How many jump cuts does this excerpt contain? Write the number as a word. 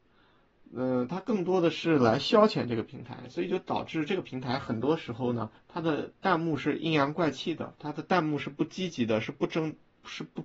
two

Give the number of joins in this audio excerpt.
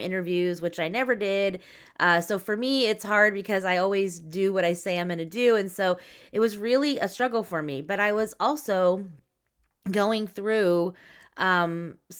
zero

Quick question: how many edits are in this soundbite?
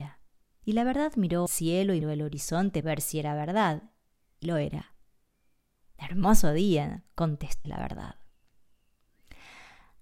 five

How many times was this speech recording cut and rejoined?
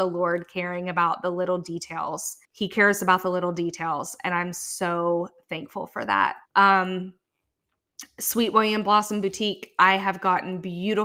two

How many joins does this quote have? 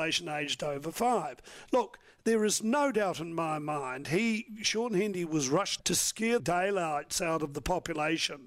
two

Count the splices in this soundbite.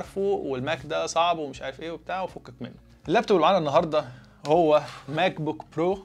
zero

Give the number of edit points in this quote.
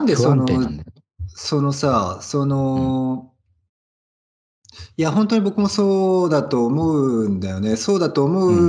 zero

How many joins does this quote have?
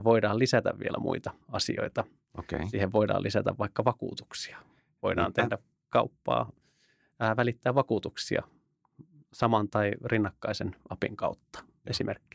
one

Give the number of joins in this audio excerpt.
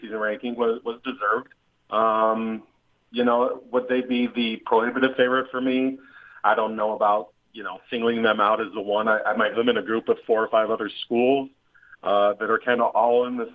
one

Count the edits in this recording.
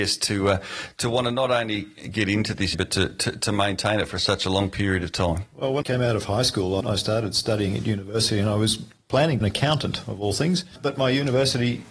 four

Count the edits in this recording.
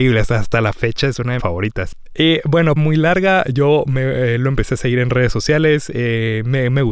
two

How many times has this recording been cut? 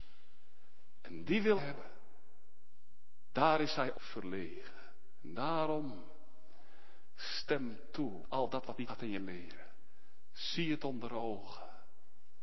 four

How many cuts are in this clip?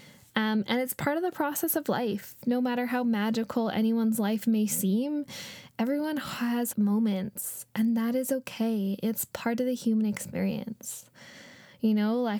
one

